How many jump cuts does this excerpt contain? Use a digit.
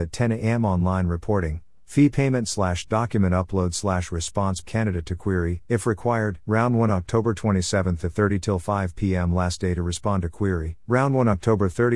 4